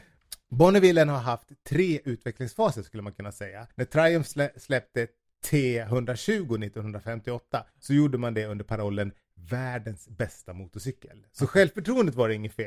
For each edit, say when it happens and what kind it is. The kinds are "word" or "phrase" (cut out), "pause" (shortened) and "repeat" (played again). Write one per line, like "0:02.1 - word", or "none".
0:03.7 - pause
0:07.7 - pause

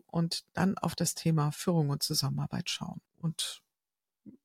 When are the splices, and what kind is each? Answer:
0:03.1 - pause

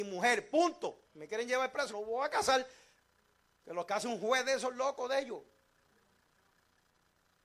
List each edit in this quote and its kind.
0:01.1 - pause
0:01.9 - phrase

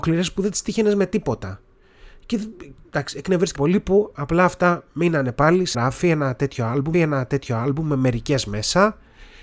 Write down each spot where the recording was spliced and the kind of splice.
0:02.8 - word
0:03.6 - word
0:05.7 - word
0:06.9 - repeat

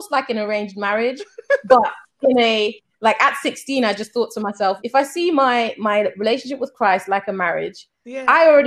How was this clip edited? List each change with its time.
0:04.8 - word

